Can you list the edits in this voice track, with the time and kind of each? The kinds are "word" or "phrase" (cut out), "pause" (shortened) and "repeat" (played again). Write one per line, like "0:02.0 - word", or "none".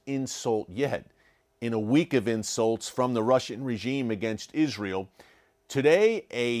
none